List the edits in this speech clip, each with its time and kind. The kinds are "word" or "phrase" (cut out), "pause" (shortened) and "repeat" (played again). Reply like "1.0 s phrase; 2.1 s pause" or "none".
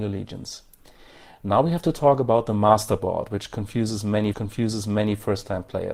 4.3 s repeat